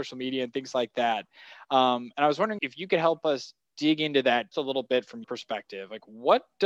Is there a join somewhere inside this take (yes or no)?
yes